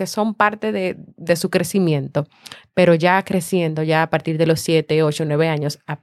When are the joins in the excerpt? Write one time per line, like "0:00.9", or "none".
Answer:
0:01.1